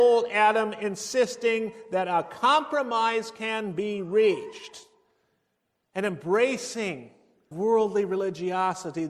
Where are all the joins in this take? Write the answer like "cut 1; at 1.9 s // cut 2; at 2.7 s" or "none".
cut 1; at 7.5 s